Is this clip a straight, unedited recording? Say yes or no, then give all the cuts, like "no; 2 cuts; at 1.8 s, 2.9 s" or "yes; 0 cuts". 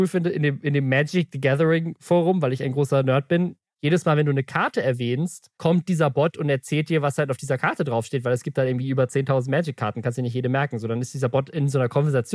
yes; 0 cuts